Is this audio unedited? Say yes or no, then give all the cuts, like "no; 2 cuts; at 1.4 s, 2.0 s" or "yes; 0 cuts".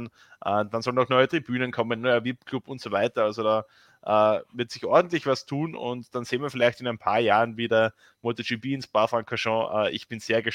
yes; 0 cuts